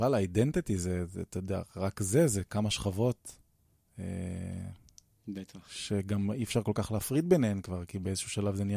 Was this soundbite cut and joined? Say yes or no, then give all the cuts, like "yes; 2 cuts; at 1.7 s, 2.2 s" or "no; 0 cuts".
no; 0 cuts